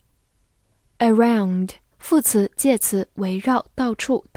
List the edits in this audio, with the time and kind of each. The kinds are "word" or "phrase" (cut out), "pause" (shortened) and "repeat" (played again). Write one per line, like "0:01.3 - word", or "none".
0:01.9 - pause